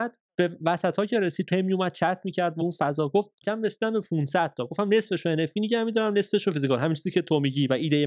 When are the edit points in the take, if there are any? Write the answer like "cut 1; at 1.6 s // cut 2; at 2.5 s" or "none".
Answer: cut 1; at 1.5 s // cut 2; at 2.6 s // cut 3; at 3.4 s